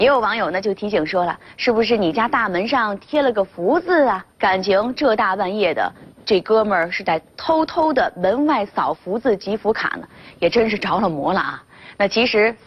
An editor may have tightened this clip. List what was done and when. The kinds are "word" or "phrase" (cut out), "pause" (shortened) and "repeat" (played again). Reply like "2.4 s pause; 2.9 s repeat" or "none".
4.3 s pause